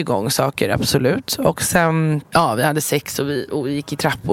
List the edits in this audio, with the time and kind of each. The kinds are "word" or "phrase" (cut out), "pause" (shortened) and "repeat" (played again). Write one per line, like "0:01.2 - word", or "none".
0:02.2 - pause